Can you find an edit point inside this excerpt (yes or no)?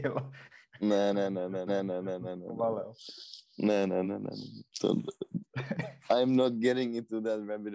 yes